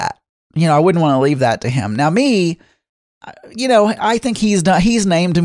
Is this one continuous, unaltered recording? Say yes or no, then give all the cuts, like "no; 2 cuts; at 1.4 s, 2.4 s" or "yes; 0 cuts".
yes; 0 cuts